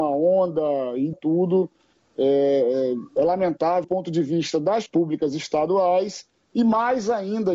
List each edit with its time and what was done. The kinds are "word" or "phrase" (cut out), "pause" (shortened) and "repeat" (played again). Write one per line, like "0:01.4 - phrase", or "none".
0:01.1 - word
0:03.8 - word
0:04.9 - word